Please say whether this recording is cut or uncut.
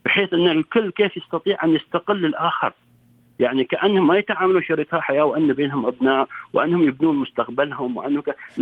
uncut